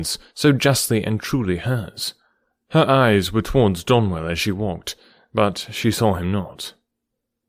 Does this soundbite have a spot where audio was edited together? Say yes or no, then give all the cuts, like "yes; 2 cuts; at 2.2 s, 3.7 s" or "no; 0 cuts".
no; 0 cuts